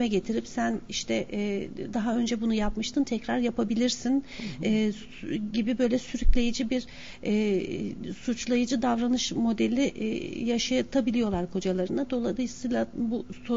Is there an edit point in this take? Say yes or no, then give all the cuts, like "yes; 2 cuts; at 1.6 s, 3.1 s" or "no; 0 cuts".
no; 0 cuts